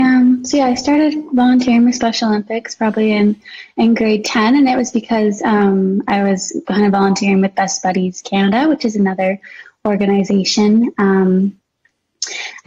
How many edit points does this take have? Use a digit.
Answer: 0